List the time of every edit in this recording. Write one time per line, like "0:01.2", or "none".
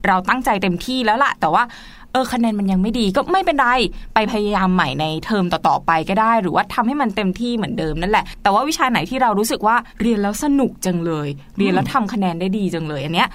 0:09.9